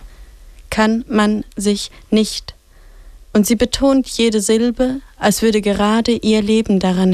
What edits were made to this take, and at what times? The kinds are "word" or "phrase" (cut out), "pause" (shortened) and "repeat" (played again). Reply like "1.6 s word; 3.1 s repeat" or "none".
3.2 s pause